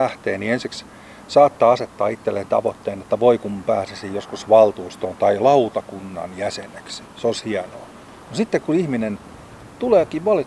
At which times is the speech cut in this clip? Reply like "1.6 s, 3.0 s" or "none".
none